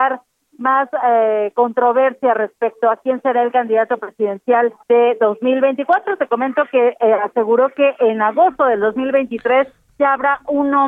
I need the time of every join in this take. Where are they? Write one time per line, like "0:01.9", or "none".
0:04.8

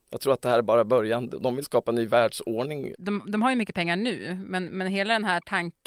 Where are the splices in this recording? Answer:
0:01.6
0:02.9

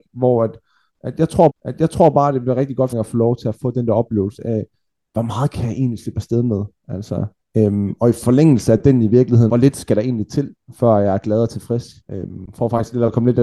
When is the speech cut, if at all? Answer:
0:01.5
0:02.9
0:09.5
0:12.0

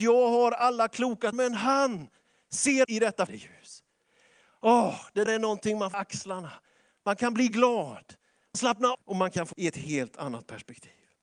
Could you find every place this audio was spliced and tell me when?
0:01.3
0:02.8
0:03.3
0:05.3
0:05.9
0:08.5
0:08.9
0:09.5

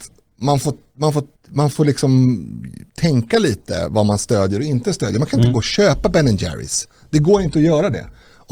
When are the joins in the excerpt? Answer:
0:01.4
0:02.9

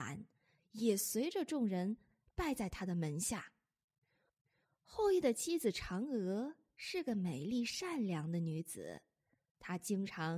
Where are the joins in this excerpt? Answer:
none

